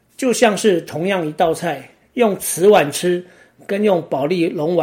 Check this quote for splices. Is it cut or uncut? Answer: uncut